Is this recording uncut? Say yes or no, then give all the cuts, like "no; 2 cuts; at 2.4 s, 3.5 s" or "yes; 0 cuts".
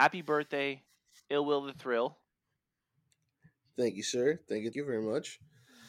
no; 1 cut; at 4.7 s